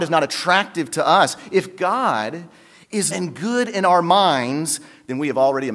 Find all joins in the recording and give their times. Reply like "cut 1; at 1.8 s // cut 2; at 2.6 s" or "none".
cut 1; at 3.1 s

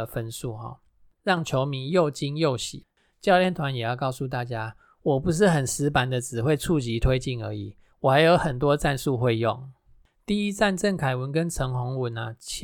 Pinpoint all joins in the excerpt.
none

